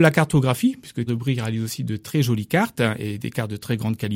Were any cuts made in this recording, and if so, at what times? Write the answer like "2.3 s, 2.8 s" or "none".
1.1 s